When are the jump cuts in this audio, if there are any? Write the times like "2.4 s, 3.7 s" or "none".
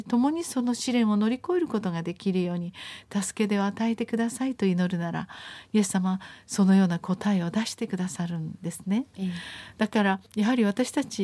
10.3 s